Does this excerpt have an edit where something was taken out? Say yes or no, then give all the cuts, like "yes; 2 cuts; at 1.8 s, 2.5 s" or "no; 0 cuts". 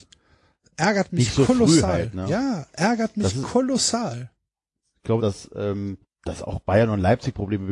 yes; 2 cuts; at 5.2 s, 6.0 s